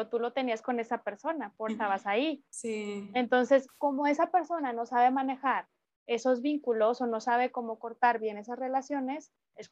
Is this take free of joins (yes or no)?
no